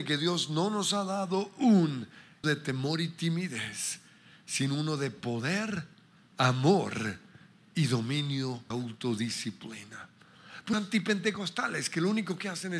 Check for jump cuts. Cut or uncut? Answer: cut